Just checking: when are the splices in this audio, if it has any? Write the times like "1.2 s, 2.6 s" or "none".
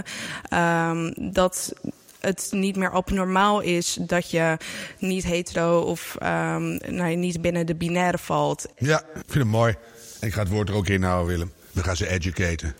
11.6 s